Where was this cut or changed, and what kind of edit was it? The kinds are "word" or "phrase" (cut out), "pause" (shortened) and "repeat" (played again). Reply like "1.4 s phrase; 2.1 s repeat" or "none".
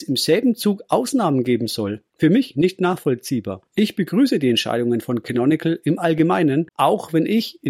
2.1 s pause; 3.7 s pause